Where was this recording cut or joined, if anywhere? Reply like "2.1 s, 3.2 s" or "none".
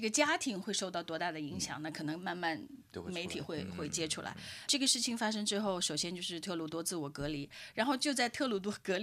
4.7 s